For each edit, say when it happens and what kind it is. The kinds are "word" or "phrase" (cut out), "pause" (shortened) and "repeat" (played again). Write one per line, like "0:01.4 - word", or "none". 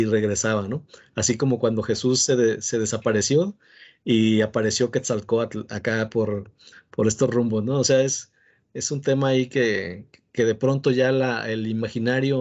none